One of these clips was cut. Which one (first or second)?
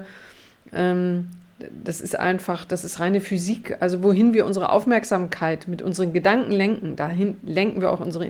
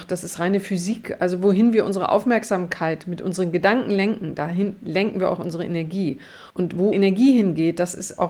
second